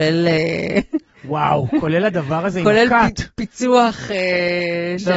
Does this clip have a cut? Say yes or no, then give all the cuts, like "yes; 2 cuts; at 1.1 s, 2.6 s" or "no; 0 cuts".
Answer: no; 0 cuts